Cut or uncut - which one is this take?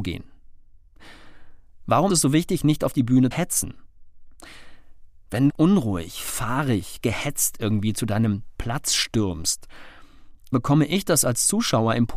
cut